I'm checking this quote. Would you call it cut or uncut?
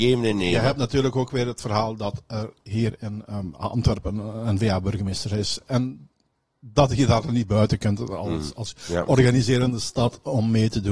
uncut